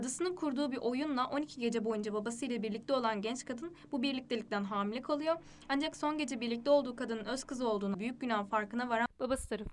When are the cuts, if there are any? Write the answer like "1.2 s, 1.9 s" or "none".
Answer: 7.9 s